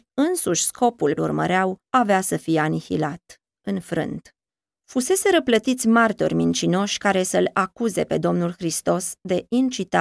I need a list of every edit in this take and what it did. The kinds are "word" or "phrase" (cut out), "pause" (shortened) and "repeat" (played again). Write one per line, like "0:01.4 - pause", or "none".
0:01.2 - phrase
0:04.5 - pause

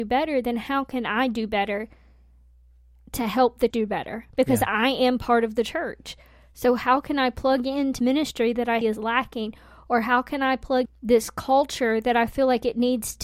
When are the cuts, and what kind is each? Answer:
0:03.7 - word
0:08.0 - word
0:08.8 - word
0:10.9 - word

